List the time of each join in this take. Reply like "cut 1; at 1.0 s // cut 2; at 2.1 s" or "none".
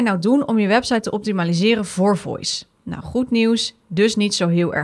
none